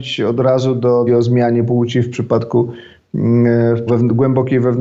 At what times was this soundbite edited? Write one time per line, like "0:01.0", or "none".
0:01.1
0:03.9